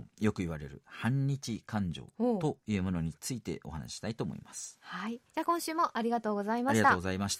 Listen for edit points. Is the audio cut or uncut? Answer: cut